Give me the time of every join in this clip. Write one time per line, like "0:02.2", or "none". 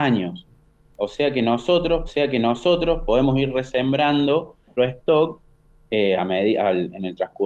0:02.1
0:04.8